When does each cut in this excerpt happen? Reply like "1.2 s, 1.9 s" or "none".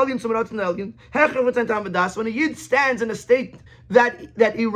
3.7 s